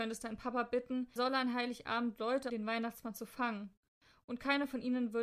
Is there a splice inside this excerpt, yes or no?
yes